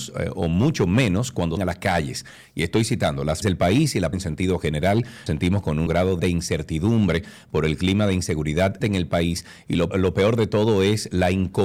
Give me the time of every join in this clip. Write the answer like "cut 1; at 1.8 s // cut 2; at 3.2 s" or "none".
cut 1; at 1.6 s // cut 2; at 3.4 s // cut 3; at 4.1 s // cut 4; at 5.3 s // cut 5; at 5.9 s // cut 6; at 6.2 s // cut 7; at 8.8 s // cut 8; at 9.9 s